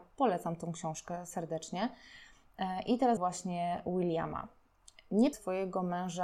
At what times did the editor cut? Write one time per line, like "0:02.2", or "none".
0:03.2
0:05.3